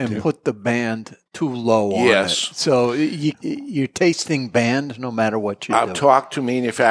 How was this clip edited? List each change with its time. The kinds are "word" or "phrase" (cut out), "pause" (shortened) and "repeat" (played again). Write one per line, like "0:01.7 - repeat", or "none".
0:01.3 - pause
0:03.3 - word

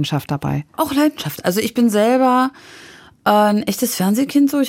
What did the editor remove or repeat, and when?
none

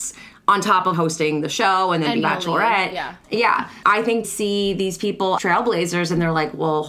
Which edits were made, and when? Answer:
0:00.9 - word
0:02.2 - word
0:04.2 - word
0:05.4 - word

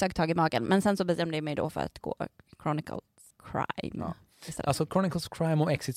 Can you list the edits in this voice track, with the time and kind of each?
0:03.3 - word

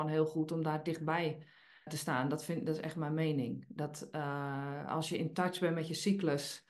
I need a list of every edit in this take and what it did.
0:01.9 - word

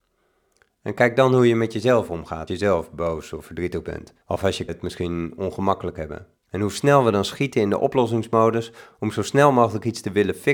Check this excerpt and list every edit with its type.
0:02.5 - word
0:04.2 - pause
0:04.7 - word
0:06.4 - pause

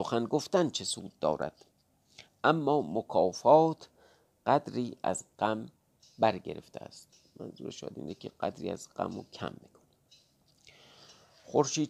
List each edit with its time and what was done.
none

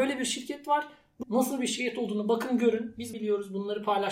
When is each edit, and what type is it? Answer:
0:01.2 - word
0:03.1 - word

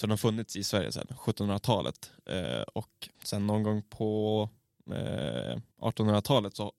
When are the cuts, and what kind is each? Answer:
0:03.1 - pause
0:05.7 - pause

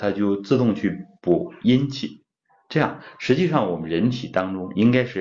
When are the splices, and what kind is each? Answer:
none

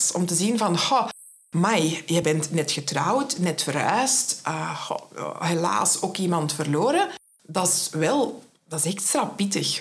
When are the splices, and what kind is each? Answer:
none

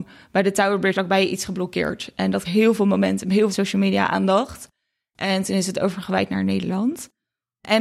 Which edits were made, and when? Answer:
0:00.9 - word
0:02.4 - word
0:03.5 - word

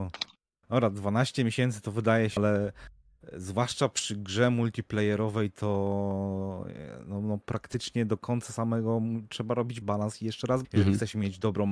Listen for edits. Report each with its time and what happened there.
0:02.4 - word
0:09.8 - word
0:10.6 - word

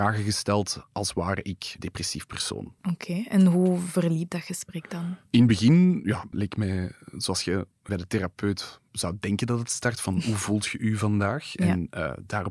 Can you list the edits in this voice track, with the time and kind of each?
0:01.8 - word
0:02.8 - pause
0:06.3 - word
0:07.9 - word
0:08.9 - pause

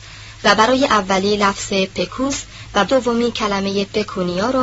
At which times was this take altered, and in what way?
0:02.9 - word

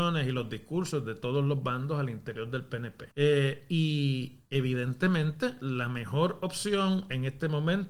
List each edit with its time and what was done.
0:03.1 - pause

